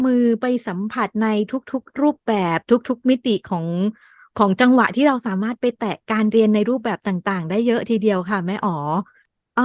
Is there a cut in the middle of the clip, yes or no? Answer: no